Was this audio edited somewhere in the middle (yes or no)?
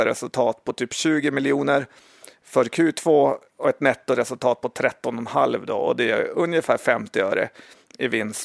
no